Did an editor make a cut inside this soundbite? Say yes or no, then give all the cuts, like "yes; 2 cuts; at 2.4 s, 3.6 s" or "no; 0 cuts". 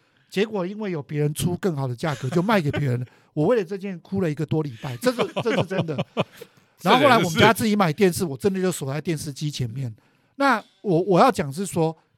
no; 0 cuts